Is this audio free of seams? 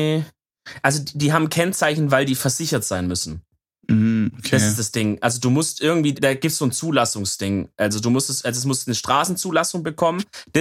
no; 1 cut; at 6.1 s

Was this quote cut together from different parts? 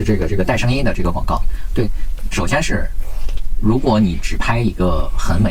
yes; 1 cut; at 2.3 s

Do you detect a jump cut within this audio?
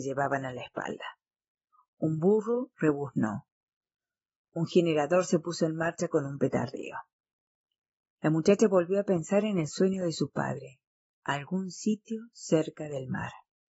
no; 0 cuts

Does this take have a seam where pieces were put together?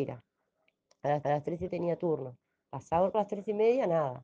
yes; 3 cuts; at 1.2 s, 1.7 s, 3.1 s

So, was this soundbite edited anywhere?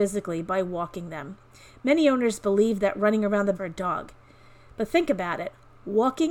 yes; 1 cut; at 3.5 s

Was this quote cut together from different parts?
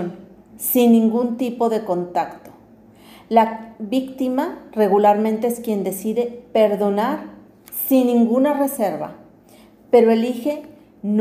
no; 0 cuts

